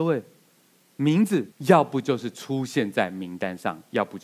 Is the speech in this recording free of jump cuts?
no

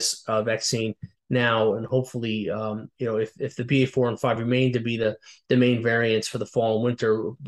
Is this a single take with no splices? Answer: yes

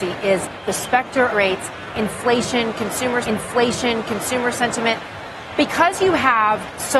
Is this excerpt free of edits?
no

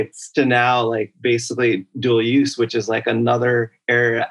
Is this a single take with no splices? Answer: yes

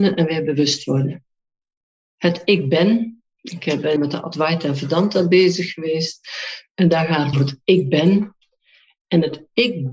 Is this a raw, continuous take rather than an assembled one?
no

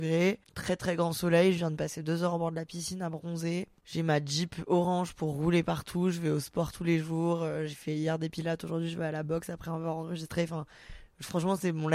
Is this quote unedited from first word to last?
yes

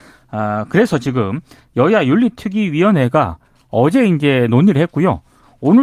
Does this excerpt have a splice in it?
no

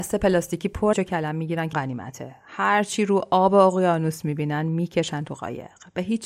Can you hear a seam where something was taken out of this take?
yes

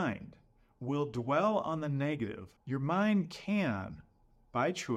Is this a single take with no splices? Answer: no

